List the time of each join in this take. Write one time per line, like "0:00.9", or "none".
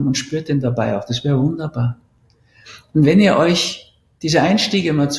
none